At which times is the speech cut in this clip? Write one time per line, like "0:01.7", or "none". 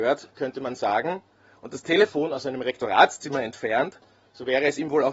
none